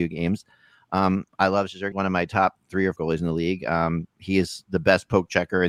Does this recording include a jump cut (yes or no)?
yes